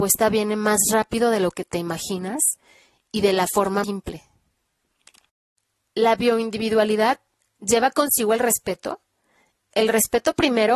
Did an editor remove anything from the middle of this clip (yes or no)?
yes